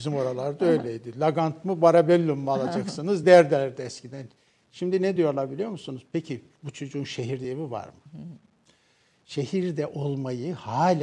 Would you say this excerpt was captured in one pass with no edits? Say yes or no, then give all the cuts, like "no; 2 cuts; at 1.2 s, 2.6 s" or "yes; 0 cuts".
yes; 0 cuts